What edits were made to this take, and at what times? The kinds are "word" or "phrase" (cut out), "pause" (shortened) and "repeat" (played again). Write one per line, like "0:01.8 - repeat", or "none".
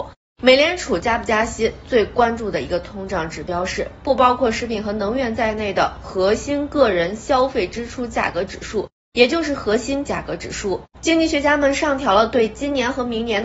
0:10.0 - word
0:10.9 - pause